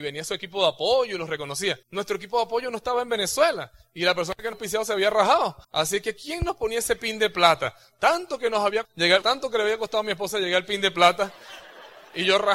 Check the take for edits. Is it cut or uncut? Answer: cut